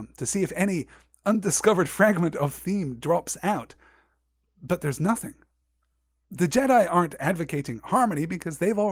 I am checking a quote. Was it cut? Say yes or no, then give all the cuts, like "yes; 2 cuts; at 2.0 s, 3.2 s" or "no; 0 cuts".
no; 0 cuts